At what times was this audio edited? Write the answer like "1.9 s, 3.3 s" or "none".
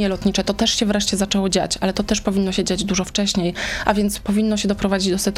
none